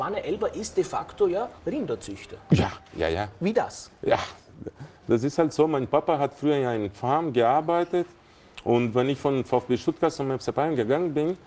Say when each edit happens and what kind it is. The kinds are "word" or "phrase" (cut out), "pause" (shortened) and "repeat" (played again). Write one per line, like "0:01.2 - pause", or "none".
0:01.6 - pause